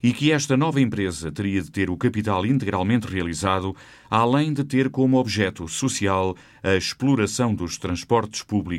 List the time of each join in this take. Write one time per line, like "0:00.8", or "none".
none